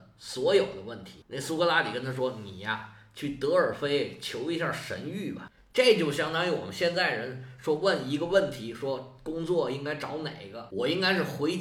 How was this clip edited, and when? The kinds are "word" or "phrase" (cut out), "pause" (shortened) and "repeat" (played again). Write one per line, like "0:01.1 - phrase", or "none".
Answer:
none